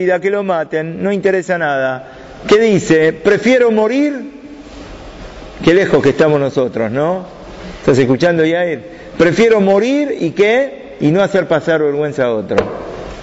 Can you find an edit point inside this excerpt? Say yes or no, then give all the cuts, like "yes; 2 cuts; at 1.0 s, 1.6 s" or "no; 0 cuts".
no; 0 cuts